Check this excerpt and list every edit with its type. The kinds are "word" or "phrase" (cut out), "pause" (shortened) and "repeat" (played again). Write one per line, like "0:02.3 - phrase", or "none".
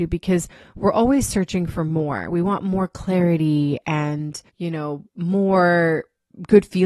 0:04.5 - pause
0:05.1 - pause